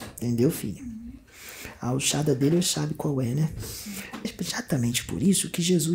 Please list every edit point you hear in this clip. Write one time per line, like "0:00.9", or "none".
0:02.6
0:04.2